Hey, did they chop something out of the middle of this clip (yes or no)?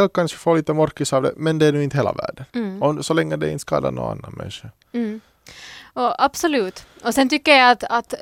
yes